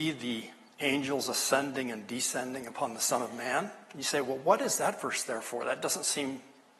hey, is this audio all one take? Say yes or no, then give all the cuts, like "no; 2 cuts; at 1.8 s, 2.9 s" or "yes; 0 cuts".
yes; 0 cuts